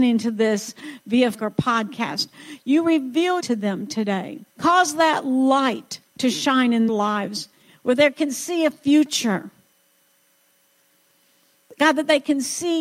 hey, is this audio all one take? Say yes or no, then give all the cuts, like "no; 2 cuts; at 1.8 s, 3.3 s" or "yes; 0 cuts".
no; 6 cuts; at 1.3 s, 3.4 s, 4.5 s, 6.1 s, 6.9 s, 8.1 s